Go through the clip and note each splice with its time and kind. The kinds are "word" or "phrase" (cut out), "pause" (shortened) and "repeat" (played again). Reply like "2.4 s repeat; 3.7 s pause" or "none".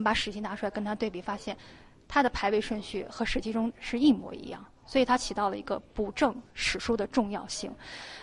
none

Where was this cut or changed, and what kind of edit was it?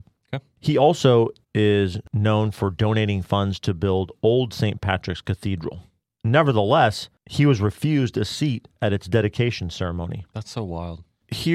none

